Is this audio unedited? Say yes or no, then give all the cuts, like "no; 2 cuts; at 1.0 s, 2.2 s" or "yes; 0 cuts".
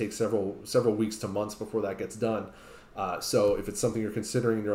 yes; 0 cuts